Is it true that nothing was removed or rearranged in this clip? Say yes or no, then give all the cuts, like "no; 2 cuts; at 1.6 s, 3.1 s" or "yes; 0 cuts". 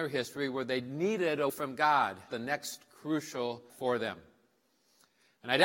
no; 3 cuts; at 1.5 s, 2.3 s, 3.7 s